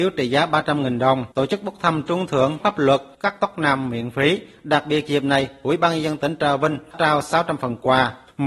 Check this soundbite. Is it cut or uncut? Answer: cut